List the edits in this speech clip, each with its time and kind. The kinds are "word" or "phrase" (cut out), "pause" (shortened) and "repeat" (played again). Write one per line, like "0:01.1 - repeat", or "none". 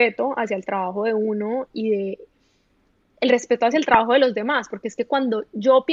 none